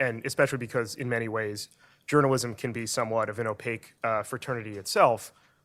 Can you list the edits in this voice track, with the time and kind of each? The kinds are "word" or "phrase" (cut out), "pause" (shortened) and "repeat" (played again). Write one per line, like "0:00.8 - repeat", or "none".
none